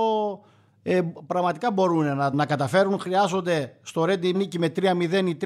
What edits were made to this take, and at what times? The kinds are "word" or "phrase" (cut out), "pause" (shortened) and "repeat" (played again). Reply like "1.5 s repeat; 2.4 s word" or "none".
2.3 s word; 4.3 s word